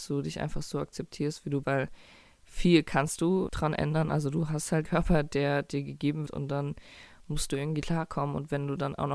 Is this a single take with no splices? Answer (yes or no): no